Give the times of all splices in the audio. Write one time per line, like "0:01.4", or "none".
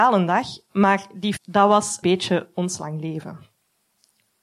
0:01.4
0:02.0